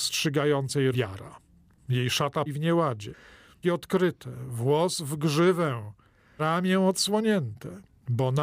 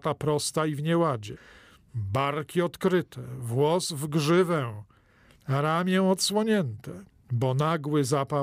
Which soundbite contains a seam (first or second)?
first